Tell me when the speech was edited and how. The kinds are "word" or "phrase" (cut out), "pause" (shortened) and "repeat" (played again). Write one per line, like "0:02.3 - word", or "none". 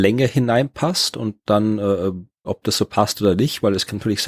0:02.4 - phrase